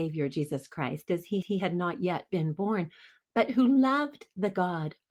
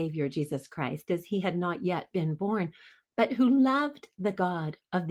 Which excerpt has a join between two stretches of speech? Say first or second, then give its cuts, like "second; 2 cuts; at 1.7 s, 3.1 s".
first; 1 cut; at 1.4 s